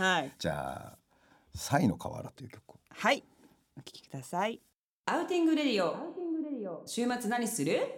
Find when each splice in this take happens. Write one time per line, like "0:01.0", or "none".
none